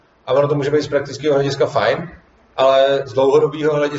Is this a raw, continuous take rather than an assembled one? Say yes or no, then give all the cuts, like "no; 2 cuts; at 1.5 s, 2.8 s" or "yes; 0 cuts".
yes; 0 cuts